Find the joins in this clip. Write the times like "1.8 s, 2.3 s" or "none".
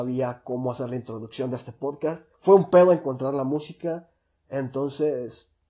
2.3 s